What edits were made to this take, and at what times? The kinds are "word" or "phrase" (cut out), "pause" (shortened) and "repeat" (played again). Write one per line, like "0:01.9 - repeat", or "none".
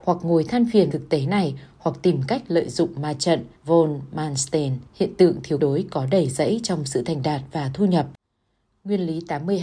0:00.9 - word
0:03.6 - pause
0:04.9 - pause
0:05.6 - word